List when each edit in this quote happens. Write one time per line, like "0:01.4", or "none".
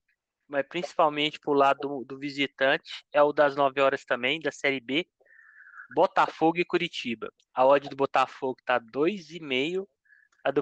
0:07.4